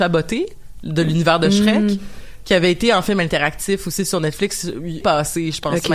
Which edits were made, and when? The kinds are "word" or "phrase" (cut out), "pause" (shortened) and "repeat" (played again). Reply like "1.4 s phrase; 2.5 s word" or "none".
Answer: 5.0 s word